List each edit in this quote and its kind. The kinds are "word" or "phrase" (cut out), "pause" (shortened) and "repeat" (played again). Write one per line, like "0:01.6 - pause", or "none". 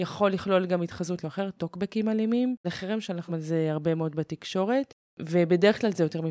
0:01.2 - word
0:02.6 - word
0:03.3 - word